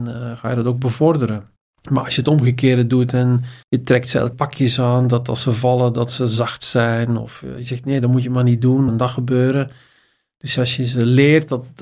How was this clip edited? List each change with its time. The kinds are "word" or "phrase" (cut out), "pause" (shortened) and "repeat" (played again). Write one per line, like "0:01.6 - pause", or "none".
0:01.6 - pause
0:03.6 - pause
0:04.3 - word
0:08.9 - phrase